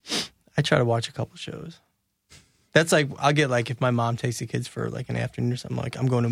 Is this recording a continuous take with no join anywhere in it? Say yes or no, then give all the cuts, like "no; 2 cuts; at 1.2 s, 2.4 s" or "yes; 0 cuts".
yes; 0 cuts